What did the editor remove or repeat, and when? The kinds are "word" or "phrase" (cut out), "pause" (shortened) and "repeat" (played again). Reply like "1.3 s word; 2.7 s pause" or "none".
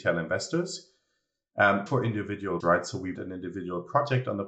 1.9 s word; 2.6 s word; 3.1 s word